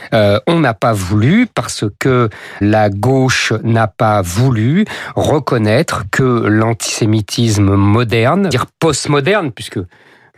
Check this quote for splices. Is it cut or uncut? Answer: cut